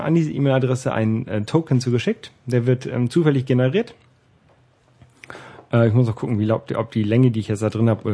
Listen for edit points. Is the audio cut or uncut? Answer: uncut